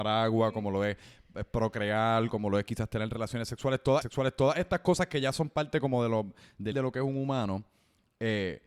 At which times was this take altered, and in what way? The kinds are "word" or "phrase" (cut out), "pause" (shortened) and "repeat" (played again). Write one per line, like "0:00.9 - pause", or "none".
0:04.0 - repeat
0:06.7 - phrase